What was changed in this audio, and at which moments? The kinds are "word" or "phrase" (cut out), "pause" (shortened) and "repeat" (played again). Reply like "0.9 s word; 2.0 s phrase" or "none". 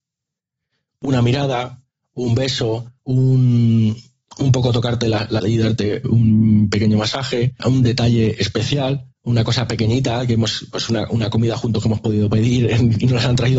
3.0 s pause; 5.4 s word; 6.0 s word; 7.6 s word; 9.1 s pause